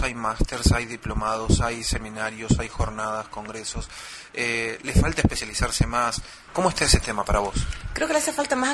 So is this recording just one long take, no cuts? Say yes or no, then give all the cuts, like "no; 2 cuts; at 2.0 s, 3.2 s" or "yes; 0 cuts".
yes; 0 cuts